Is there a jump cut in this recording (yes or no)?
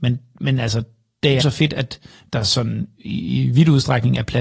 yes